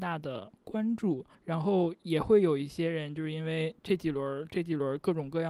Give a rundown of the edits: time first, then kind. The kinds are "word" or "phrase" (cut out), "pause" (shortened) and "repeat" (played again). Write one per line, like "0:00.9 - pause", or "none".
0:01.3 - pause
0:03.8 - pause

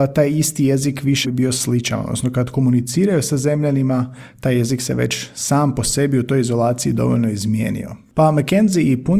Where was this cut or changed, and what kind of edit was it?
0:01.2 - word

